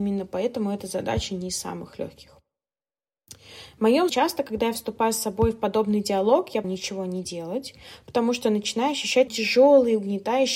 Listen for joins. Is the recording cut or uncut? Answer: cut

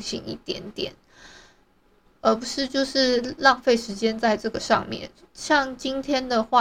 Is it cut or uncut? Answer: uncut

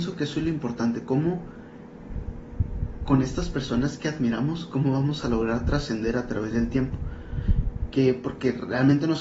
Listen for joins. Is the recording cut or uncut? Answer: uncut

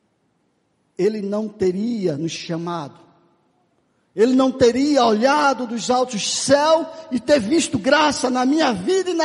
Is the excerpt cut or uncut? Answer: uncut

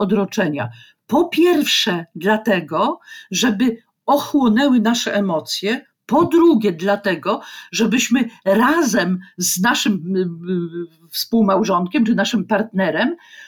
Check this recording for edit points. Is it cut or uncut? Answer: uncut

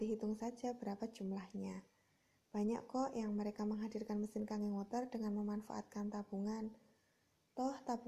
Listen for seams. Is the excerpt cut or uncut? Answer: uncut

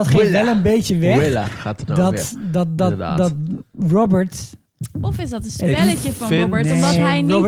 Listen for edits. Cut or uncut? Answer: uncut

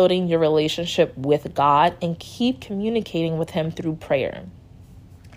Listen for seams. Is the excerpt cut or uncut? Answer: uncut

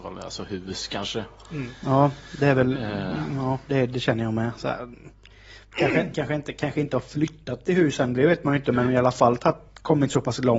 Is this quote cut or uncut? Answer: uncut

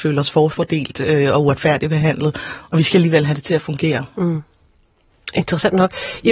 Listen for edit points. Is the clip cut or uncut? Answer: uncut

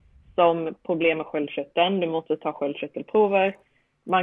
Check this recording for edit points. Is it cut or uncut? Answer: uncut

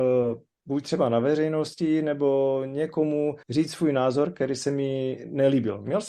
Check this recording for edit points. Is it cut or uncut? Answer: cut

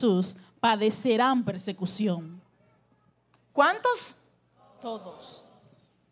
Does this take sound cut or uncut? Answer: uncut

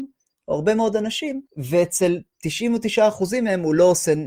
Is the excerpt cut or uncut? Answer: cut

